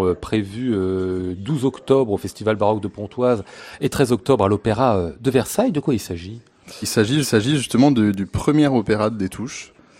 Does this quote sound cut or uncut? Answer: cut